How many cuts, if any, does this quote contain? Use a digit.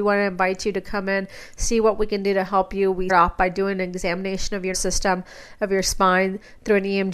2